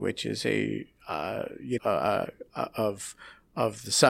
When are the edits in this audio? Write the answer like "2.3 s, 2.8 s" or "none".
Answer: 1.8 s

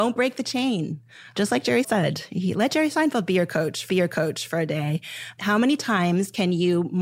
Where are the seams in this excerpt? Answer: 1.8 s, 3.9 s

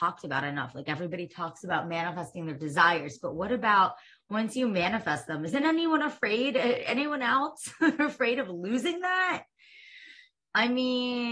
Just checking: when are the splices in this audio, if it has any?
none

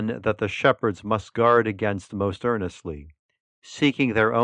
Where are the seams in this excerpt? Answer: none

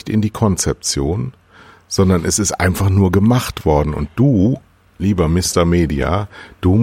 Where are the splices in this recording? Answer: none

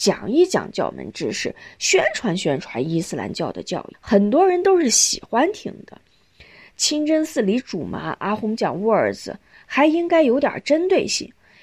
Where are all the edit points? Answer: none

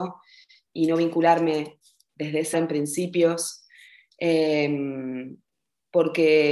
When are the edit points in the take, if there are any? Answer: 2.1 s, 2.5 s

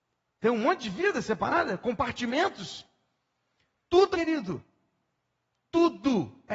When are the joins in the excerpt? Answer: 4.1 s

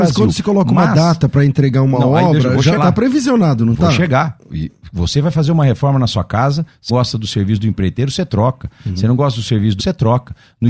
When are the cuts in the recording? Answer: 2.8 s, 6.9 s, 9.8 s

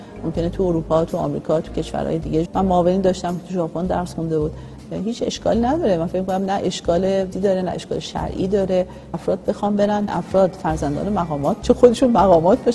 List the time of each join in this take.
2.5 s, 7.3 s, 9.1 s, 10.1 s, 11.6 s

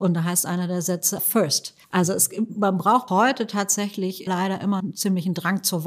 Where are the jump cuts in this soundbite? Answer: 1.2 s, 1.8 s, 3.1 s, 4.3 s, 4.8 s

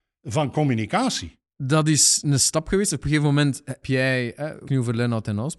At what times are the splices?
3.0 s, 3.8 s, 4.7 s

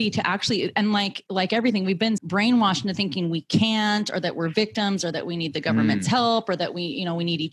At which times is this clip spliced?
2.2 s

